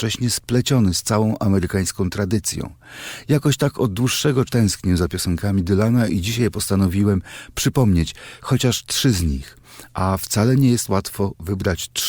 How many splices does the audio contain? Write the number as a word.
one